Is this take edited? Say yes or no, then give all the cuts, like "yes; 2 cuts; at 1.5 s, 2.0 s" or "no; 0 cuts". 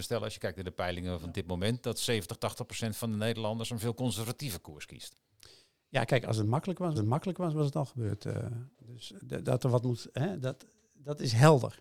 yes; 1 cut; at 6.9 s